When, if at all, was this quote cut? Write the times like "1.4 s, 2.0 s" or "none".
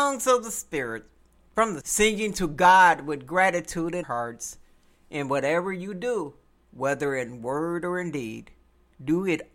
1.8 s, 4.0 s, 6.6 s